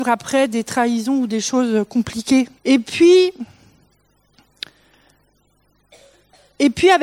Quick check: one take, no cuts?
no; 1 cut; at 2.6 s

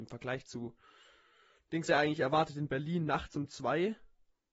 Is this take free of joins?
no; 1 cut; at 1.9 s

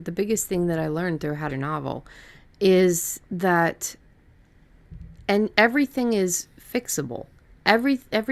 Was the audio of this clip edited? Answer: yes; 1 cut; at 1.5 s

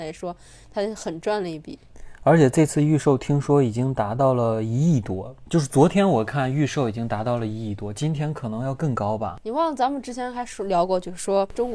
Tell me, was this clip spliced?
no; 0 cuts

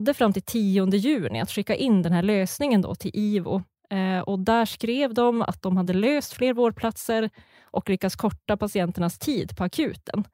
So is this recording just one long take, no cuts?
yes; 0 cuts

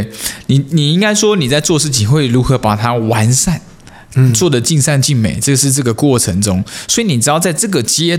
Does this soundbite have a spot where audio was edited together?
no; 0 cuts

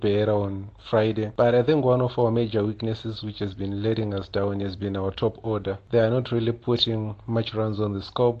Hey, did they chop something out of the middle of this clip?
no; 0 cuts

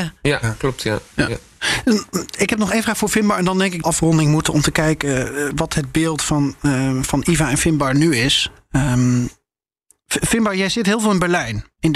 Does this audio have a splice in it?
yes; 2 cuts; at 3.8 s, 5.5 s

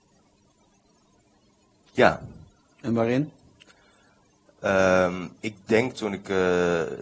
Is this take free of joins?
no; 2 cuts; at 5.4 s, 5.9 s

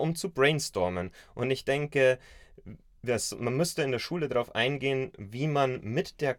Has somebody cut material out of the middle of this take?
no; 0 cuts

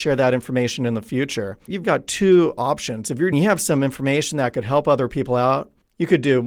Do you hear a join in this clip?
yes; 2 cuts; at 1.8 s, 3.3 s

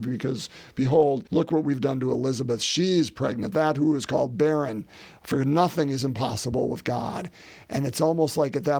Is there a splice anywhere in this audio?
yes; 1 cut; at 1.3 s

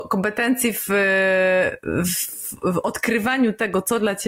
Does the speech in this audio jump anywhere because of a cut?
no; 0 cuts

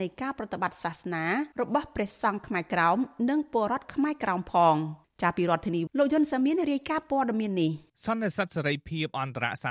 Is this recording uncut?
no; 4 cuts; at 1.5 s, 5.0 s, 5.9 s, 7.9 s

